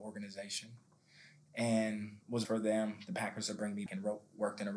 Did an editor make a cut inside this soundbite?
yes; 2 cuts; at 2.4 s, 3.9 s

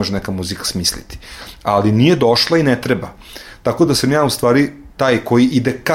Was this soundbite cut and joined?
no; 0 cuts

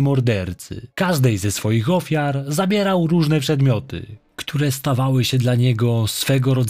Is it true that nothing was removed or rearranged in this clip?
no; 1 cut; at 0.9 s

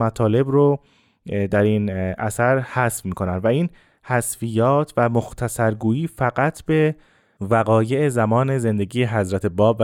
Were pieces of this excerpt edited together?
no; 0 cuts

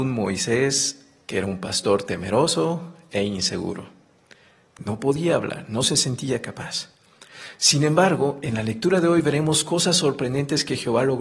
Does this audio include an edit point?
no; 0 cuts

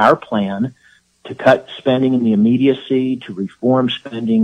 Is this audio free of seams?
yes; 0 cuts

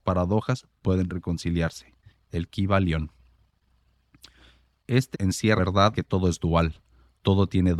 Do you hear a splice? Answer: yes; 3 cuts; at 5.1 s, 5.6 s, 5.9 s

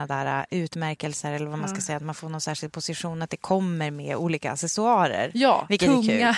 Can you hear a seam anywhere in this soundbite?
no; 0 cuts

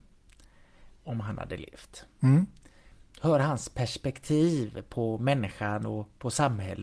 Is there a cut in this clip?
no; 0 cuts

